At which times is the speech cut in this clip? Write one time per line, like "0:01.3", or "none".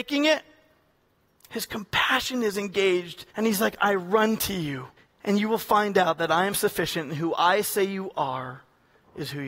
0:03.3
0:05.0